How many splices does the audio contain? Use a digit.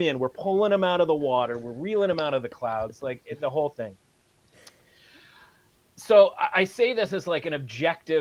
0